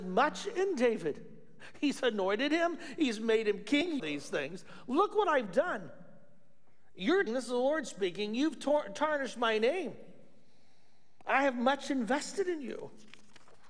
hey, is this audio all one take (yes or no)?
no